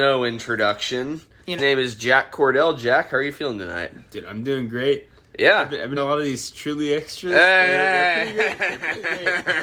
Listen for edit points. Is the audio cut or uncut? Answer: cut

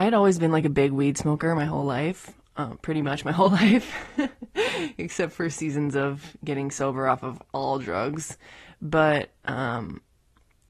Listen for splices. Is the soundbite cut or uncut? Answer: uncut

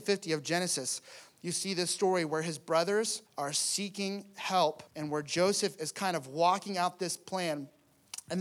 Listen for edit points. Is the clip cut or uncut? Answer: cut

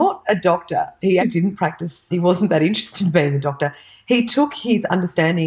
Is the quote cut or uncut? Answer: cut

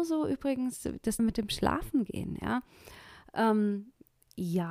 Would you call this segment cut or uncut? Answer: cut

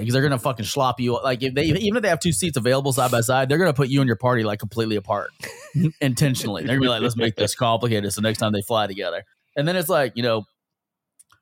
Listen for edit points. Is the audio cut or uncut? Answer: cut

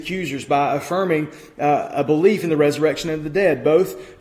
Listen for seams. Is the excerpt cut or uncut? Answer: uncut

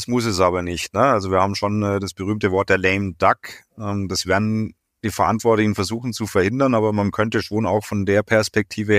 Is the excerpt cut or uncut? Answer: uncut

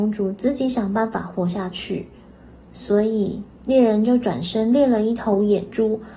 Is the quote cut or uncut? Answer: uncut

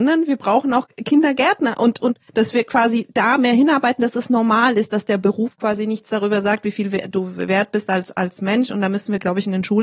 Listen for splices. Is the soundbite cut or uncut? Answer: cut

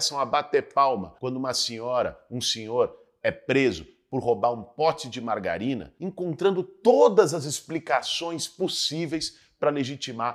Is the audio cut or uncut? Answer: uncut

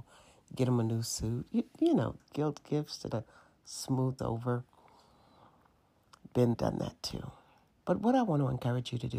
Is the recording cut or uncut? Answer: cut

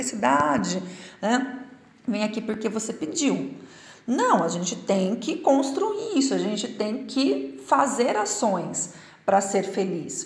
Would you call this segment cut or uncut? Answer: uncut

